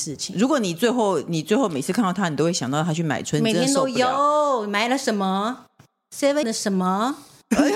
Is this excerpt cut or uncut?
cut